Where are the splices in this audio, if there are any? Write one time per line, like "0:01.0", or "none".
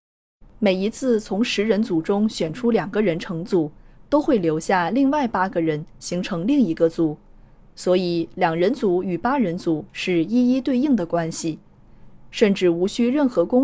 none